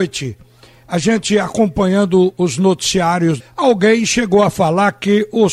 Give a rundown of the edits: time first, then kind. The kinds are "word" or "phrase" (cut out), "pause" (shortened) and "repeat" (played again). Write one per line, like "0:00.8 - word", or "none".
0:03.4 - phrase